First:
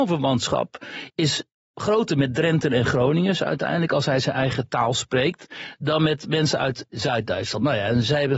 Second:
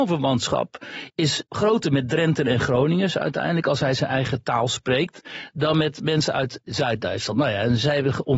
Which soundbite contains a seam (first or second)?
second